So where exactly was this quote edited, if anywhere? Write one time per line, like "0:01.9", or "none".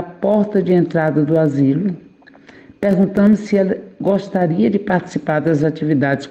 none